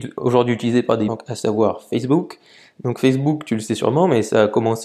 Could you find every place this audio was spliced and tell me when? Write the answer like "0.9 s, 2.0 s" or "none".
1.1 s